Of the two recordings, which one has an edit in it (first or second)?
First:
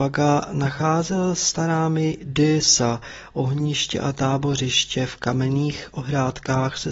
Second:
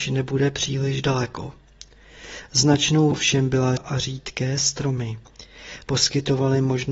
second